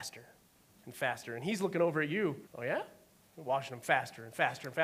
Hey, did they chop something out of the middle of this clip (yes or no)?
yes